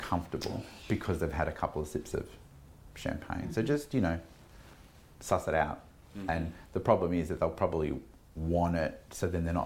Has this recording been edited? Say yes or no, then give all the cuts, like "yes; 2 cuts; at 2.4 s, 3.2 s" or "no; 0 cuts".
no; 0 cuts